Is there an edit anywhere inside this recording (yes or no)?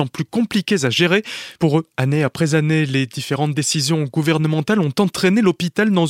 no